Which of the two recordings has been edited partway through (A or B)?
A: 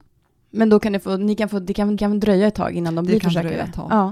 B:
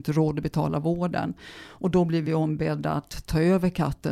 A